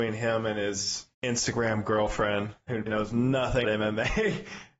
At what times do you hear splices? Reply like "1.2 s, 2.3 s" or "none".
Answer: 1.1 s, 2.9 s, 3.6 s